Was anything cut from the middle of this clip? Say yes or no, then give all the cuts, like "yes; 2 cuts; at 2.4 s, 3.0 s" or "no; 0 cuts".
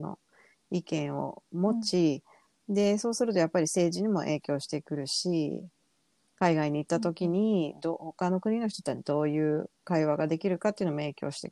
yes; 1 cut; at 9.7 s